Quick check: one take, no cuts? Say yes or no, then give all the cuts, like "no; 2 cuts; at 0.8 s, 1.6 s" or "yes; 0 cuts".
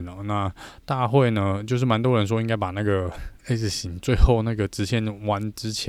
yes; 0 cuts